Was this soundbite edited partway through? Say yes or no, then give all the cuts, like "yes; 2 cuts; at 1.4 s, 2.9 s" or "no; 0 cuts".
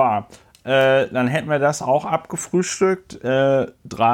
no; 0 cuts